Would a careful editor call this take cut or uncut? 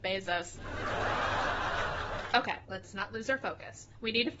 cut